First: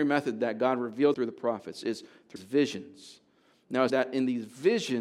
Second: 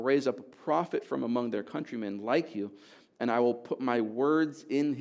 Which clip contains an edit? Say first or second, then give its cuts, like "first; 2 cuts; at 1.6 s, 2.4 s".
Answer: first; 3 cuts; at 1.1 s, 2.4 s, 3.9 s